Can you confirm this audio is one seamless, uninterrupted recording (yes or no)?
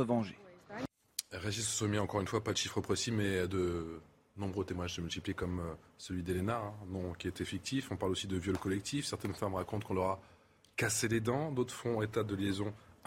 yes